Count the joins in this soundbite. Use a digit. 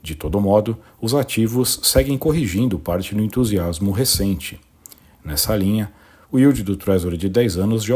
0